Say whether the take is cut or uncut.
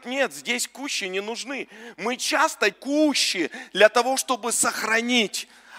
cut